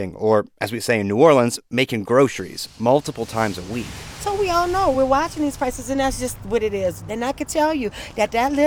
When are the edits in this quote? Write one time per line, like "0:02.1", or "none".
none